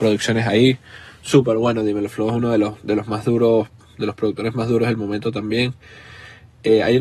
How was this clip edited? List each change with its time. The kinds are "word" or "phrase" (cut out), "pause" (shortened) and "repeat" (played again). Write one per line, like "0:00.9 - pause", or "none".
none